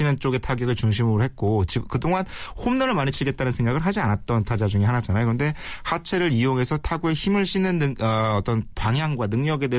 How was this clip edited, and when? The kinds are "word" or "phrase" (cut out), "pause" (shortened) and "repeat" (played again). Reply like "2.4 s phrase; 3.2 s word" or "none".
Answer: none